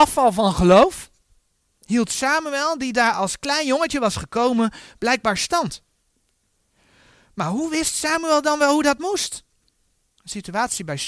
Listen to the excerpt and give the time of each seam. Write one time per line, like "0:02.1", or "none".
none